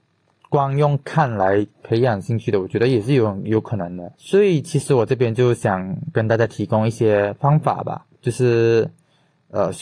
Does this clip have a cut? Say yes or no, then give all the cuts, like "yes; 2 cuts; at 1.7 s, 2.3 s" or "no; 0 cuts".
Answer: yes; 3 cuts; at 1.7 s, 4.1 s, 8.1 s